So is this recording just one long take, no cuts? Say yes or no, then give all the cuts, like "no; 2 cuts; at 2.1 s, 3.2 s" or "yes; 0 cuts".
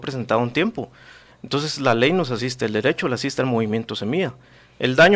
yes; 0 cuts